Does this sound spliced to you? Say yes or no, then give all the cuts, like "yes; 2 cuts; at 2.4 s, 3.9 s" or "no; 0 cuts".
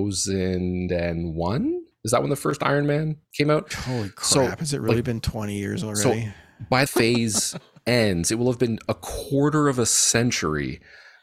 yes; 2 cuts; at 3.2 s, 6.9 s